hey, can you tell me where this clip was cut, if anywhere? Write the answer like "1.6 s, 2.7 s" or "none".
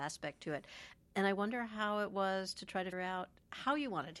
2.9 s